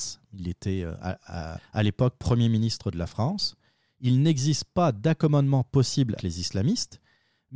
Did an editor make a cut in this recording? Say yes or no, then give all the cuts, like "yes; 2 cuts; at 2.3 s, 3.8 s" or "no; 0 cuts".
yes; 2 cuts; at 1.6 s, 6.2 s